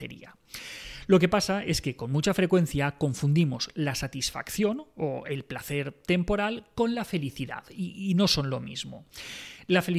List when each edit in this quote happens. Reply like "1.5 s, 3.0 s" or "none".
none